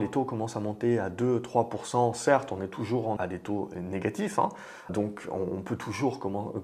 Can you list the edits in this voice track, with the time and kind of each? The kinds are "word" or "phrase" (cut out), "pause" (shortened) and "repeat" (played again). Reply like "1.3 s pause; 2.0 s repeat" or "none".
3.2 s word; 4.9 s word